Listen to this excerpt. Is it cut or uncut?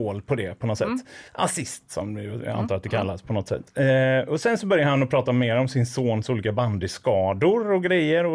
cut